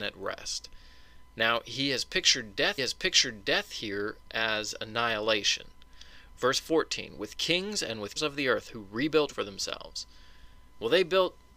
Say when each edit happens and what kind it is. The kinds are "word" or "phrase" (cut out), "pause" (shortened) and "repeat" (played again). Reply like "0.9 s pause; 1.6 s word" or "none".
2.8 s repeat; 8.2 s word; 9.3 s word

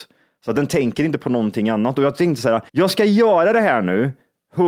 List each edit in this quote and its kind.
2.7 s pause

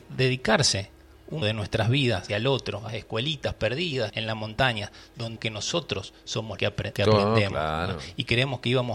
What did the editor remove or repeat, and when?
1.4 s word; 2.3 s word; 2.9 s word; 4.1 s word; 5.4 s word; 6.6 s word; 6.9 s word

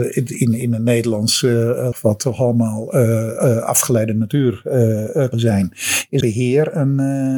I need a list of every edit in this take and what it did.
1.9 s word; 5.3 s word; 6.2 s word

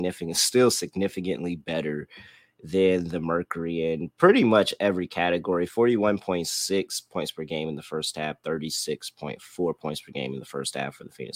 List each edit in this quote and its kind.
none

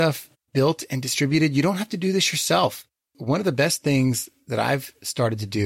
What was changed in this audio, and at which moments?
none

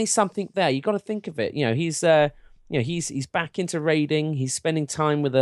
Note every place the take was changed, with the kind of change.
none

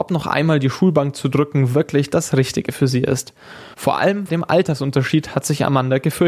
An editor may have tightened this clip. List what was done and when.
3.7 s pause; 4.3 s word

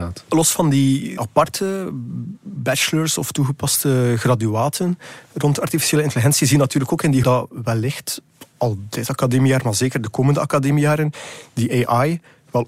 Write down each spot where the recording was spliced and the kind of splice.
1.2 s word; 7.2 s word

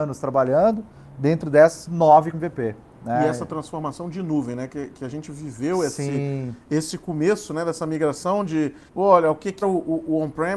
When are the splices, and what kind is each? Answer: 2.3 s word; 8.9 s pause; 9.6 s word

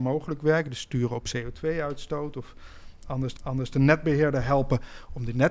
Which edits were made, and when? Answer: 3.4 s repeat

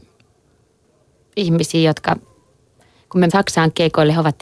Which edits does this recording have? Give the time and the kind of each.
3.3 s word

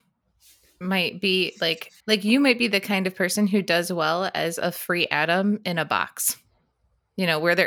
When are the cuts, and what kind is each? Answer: 2.0 s pause

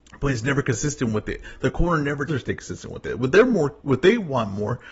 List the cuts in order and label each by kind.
2.3 s word; 3.8 s pause

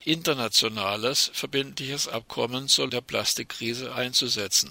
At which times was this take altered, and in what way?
2.9 s word

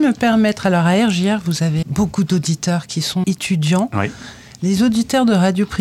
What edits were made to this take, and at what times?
1.8 s word; 3.2 s word

